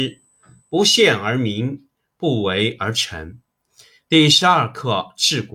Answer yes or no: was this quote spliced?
no